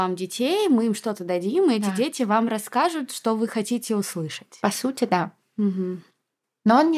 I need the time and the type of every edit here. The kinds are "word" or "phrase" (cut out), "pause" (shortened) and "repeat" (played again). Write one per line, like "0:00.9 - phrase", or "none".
none